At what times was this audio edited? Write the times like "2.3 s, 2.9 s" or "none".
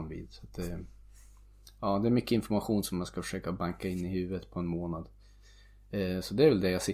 none